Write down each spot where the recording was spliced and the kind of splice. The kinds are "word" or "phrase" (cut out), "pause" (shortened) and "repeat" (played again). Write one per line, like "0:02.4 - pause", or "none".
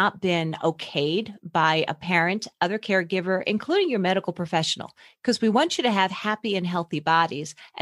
none